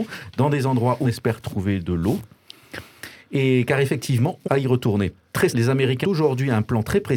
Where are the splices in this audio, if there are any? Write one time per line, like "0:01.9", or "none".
0:01.0
0:04.4
0:05.5
0:06.0